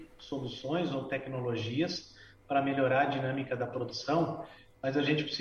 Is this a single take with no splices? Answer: yes; 0 cuts

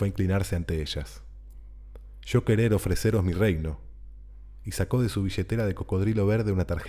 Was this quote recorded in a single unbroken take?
yes; 0 cuts

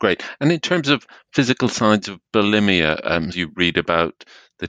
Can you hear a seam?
yes; 1 cut; at 3.3 s

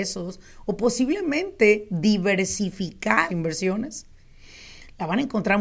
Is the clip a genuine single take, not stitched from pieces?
no; 1 cut; at 3.3 s

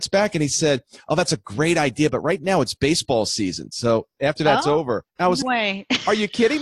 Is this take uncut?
no; 2 cuts; at 5.1 s, 5.4 s

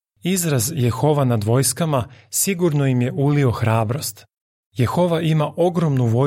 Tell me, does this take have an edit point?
no; 0 cuts

